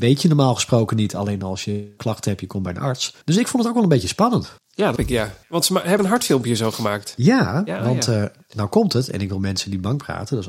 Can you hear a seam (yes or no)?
yes